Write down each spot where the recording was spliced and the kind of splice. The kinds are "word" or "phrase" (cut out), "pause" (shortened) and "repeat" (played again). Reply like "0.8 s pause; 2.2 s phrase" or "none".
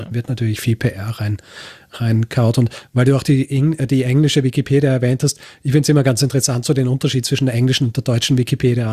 none